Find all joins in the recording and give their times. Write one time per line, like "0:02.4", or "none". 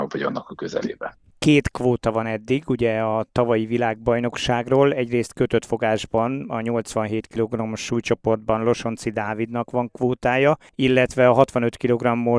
none